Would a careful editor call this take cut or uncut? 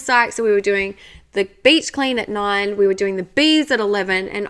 uncut